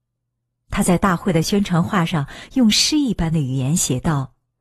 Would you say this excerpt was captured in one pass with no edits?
yes; 0 cuts

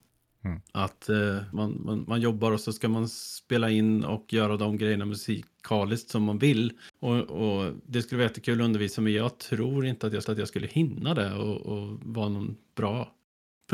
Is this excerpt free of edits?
no; 3 cuts; at 1.5 s, 6.9 s, 10.2 s

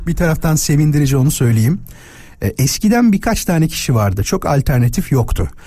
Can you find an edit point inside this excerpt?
no; 0 cuts

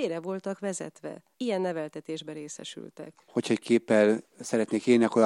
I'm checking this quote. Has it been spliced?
yes; 1 cut; at 3.6 s

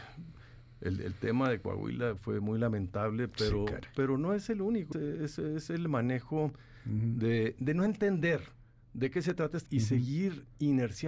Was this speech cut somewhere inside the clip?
yes; 3 cuts; at 2.2 s, 4.9 s, 9.7 s

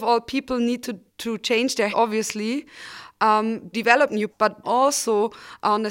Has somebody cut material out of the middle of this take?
yes; 5 cuts; at 1.1 s, 1.9 s, 3.7 s, 4.3 s, 4.6 s

